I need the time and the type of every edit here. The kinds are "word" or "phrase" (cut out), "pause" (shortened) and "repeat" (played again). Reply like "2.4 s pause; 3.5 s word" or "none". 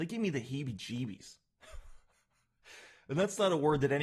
none